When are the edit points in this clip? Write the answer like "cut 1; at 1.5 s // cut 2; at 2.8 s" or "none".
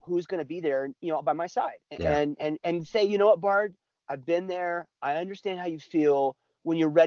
cut 1; at 1.8 s